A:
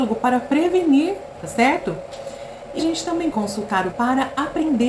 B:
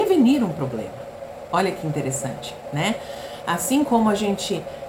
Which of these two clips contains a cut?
A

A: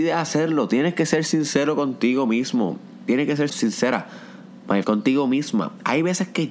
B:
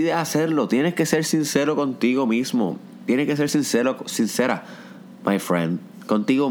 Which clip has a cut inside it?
A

